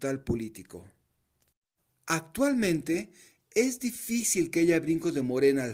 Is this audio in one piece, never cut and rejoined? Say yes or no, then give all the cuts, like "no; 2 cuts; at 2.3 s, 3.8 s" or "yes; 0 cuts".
yes; 0 cuts